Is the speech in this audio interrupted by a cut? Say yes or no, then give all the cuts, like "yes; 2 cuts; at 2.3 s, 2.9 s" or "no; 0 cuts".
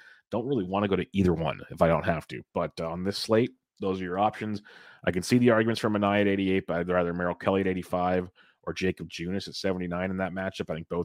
no; 0 cuts